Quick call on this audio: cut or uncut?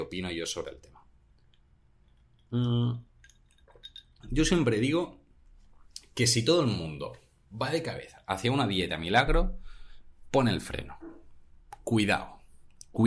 uncut